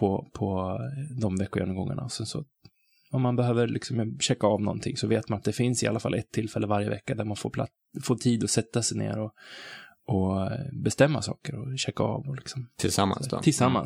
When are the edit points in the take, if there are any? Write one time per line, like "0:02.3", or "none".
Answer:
none